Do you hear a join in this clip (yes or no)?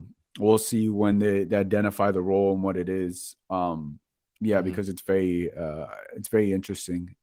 no